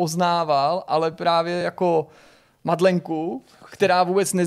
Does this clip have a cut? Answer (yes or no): no